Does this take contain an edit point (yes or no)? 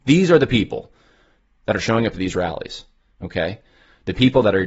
no